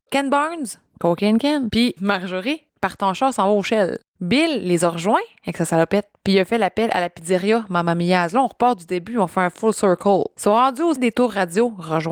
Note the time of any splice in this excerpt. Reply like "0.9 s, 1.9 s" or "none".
2.7 s, 11.0 s